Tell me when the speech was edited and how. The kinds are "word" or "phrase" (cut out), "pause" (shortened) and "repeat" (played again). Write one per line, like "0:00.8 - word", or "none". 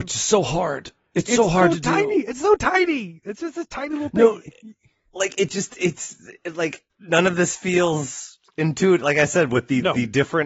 0:06.9 - pause